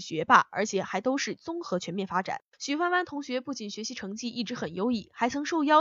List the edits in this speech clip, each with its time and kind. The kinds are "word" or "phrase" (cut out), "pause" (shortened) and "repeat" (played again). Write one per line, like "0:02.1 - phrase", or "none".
0:02.5 - pause